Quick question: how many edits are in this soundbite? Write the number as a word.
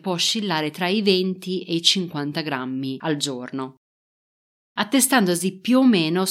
zero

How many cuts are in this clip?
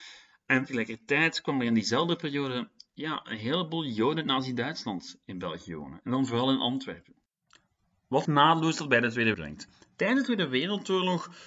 two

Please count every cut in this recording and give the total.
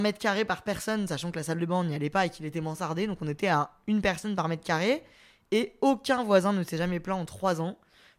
zero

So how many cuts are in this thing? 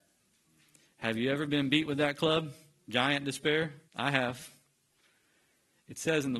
one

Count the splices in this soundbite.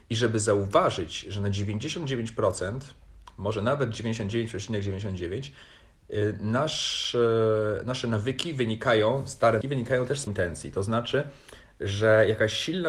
two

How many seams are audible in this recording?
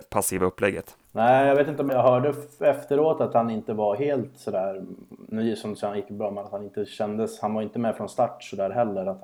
two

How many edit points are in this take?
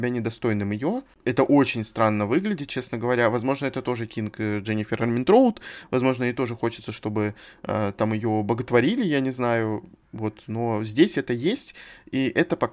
zero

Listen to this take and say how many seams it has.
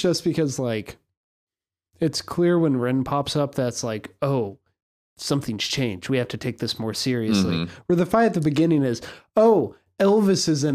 zero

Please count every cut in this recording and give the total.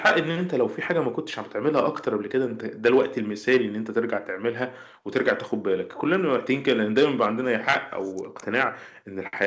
zero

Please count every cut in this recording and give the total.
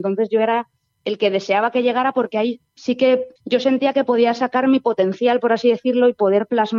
one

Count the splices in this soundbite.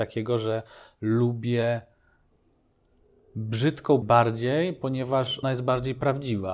two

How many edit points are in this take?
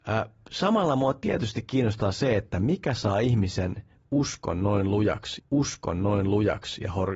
one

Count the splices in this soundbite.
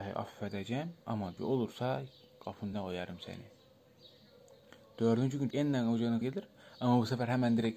four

